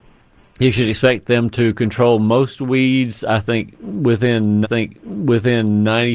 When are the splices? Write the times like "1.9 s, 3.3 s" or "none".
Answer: 4.6 s